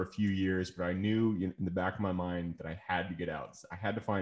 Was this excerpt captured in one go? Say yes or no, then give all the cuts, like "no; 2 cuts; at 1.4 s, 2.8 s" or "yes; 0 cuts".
yes; 0 cuts